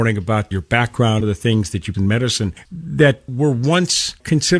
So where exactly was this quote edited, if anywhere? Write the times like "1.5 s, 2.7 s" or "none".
1.2 s, 1.9 s, 2.6 s